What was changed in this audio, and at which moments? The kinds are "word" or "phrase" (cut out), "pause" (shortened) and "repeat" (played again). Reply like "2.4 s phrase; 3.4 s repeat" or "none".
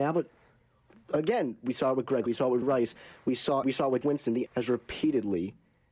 2.3 s word; 2.6 s word; 3.6 s word; 4.0 s word; 4.5 s word